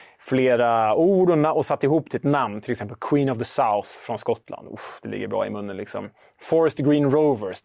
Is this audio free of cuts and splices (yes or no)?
yes